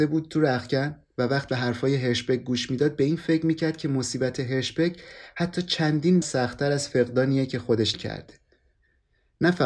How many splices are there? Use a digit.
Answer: 3